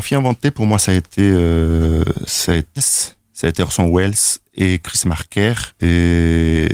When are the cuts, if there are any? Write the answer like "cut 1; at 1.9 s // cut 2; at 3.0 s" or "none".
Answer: cut 1; at 2.8 s

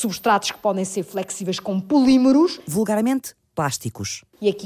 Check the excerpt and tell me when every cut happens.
none

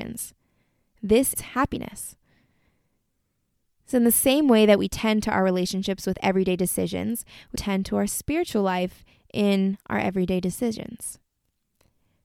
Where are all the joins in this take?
cut 1; at 1.3 s // cut 2; at 7.5 s

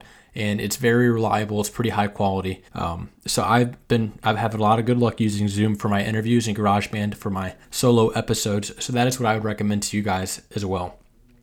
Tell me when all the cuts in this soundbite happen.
cut 1; at 2.7 s // cut 2; at 7.6 s

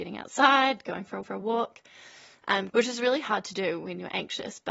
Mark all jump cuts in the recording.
cut 1; at 1.2 s // cut 2; at 2.7 s

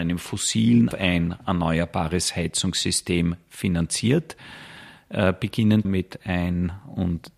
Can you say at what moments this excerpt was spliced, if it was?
cut 1; at 0.9 s // cut 2; at 5.8 s

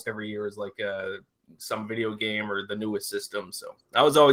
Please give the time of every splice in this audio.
none

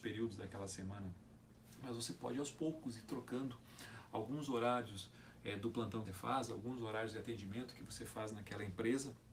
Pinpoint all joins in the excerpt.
cut 1; at 6.0 s

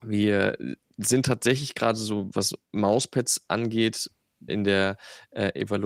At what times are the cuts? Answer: cut 1; at 2.3 s // cut 2; at 4.5 s

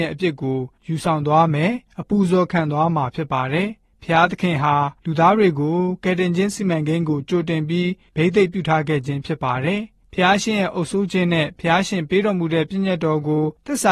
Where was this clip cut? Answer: cut 1; at 5.0 s

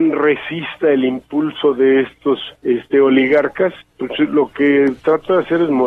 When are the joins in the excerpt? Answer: cut 1; at 2.6 s // cut 2; at 3.8 s

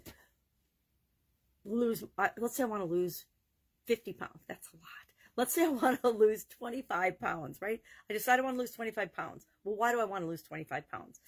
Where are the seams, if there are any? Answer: none

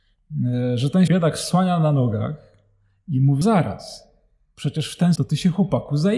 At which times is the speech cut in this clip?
cut 1; at 1.1 s // cut 2; at 3.4 s // cut 3; at 5.2 s

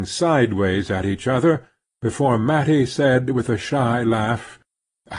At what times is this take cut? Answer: none

